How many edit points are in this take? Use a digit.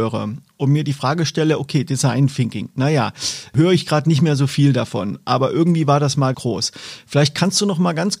1